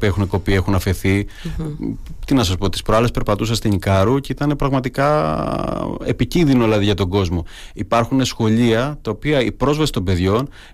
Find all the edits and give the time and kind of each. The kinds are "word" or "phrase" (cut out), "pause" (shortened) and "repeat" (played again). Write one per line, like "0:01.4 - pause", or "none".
none

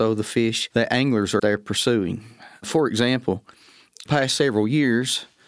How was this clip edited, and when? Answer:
0:01.4 - word
0:04.1 - word

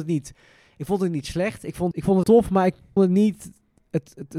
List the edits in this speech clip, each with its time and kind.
0:01.9 - word
0:02.2 - word
0:03.0 - word

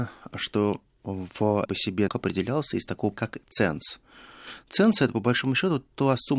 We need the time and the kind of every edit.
0:01.7 - phrase
0:02.1 - word
0:03.1 - word

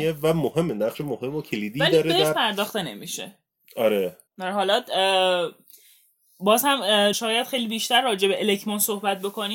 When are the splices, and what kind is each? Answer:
0:04.3 - pause
0:07.1 - word

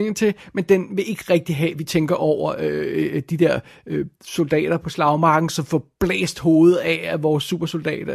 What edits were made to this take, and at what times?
none

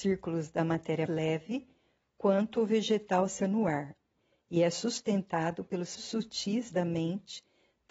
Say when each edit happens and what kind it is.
0:01.1 - word
0:03.4 - word
0:06.0 - word

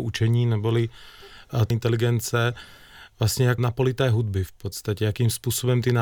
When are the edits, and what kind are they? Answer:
0:01.7 - word
0:03.6 - phrase

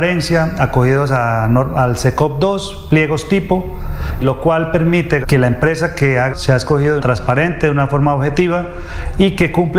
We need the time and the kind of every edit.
0:04.2 - word
0:05.2 - word
0:06.3 - phrase
0:07.0 - phrase

